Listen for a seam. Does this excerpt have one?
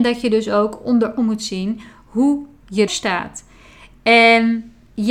yes; 2 cuts; at 1.2 s, 2.9 s

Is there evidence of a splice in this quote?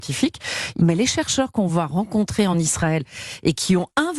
no; 0 cuts

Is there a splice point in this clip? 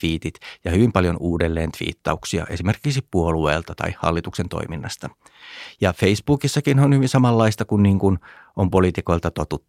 no; 0 cuts

